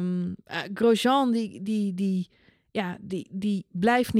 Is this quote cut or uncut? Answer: uncut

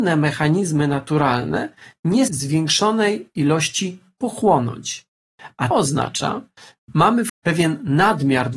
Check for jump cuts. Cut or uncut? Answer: cut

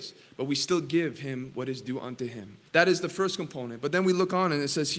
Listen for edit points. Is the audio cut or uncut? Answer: cut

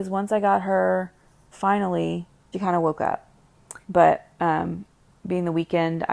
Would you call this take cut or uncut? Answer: cut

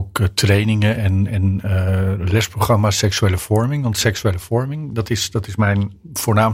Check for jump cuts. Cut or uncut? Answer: uncut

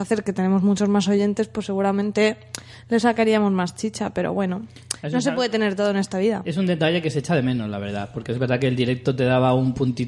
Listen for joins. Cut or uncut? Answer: uncut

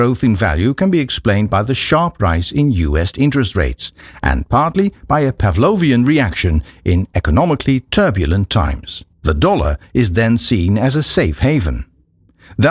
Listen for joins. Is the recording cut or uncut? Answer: cut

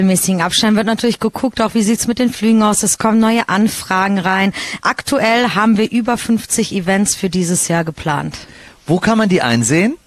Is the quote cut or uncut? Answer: uncut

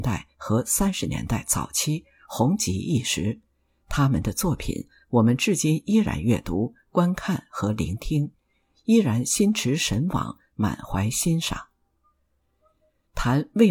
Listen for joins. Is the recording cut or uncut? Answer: uncut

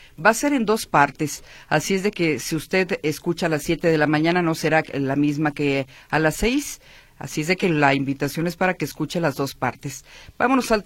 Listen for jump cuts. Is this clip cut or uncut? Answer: uncut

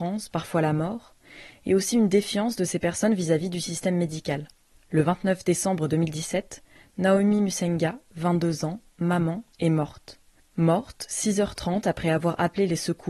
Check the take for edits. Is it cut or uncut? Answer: cut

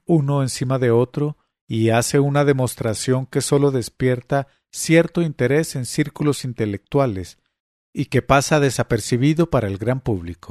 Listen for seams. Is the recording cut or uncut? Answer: uncut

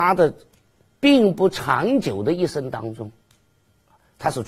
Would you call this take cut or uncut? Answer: uncut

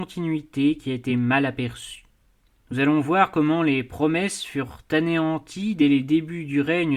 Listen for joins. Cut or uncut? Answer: uncut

